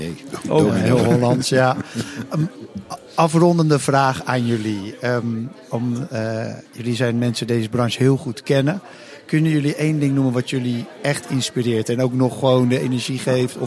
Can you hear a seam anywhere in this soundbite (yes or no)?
yes